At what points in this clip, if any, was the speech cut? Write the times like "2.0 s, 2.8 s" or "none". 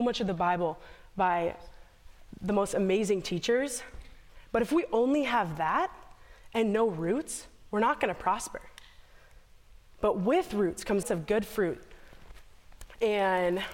11.0 s